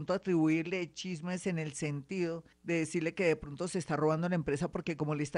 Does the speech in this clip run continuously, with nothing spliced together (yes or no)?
no